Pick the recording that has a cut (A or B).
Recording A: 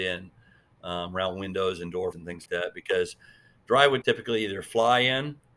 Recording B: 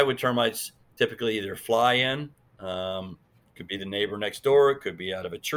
A